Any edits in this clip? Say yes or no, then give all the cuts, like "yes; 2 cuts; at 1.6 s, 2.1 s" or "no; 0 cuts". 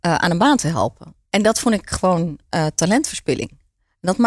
yes; 1 cut; at 1.3 s